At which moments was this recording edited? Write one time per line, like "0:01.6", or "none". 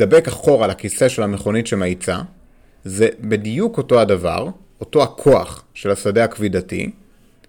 none